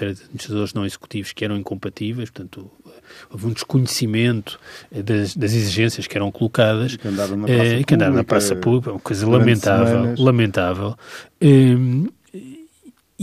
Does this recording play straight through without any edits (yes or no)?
yes